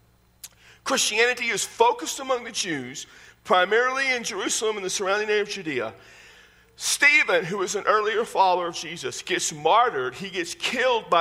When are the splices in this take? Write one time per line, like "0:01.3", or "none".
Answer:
none